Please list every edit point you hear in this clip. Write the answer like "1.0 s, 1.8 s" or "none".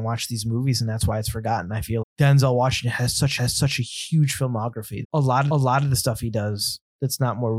2.0 s, 3.4 s, 5.0 s, 5.5 s